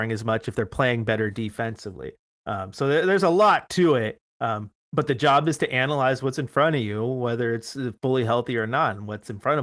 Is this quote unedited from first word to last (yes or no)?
yes